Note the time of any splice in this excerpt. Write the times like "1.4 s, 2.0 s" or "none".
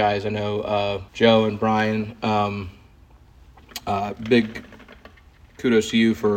1.1 s